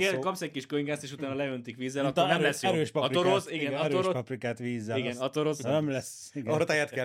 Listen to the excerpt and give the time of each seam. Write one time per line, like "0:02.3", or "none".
none